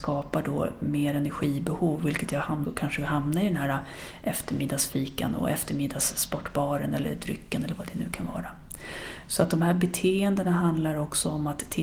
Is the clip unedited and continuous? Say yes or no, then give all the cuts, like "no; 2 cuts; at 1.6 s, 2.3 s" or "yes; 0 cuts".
no; 1 cut; at 2.6 s